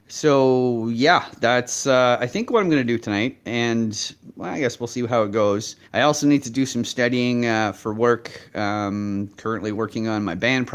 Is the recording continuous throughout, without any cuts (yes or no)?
no